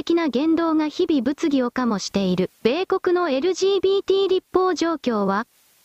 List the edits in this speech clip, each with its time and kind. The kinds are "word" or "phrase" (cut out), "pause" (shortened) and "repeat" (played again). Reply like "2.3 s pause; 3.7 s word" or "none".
2.6 s pause